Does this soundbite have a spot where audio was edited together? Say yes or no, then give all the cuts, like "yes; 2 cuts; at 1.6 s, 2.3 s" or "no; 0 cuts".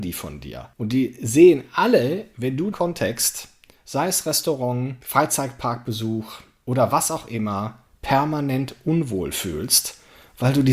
yes; 1 cut; at 2.7 s